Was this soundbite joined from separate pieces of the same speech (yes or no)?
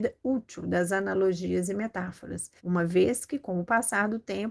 yes